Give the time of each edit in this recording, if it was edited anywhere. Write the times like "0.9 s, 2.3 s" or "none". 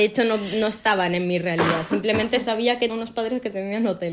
2.9 s